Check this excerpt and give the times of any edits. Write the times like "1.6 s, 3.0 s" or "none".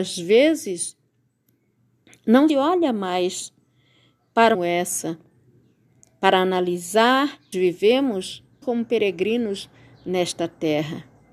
2.5 s, 4.5 s, 7.5 s, 8.6 s